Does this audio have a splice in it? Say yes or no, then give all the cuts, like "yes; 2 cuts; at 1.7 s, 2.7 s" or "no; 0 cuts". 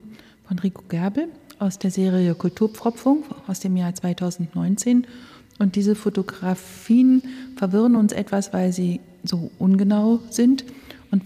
no; 0 cuts